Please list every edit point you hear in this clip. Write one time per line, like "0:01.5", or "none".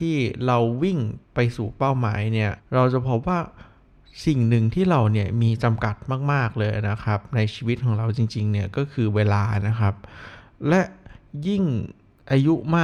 0:01.2
0:02.6